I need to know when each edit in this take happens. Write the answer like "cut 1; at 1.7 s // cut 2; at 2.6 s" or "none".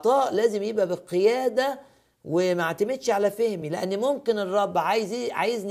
none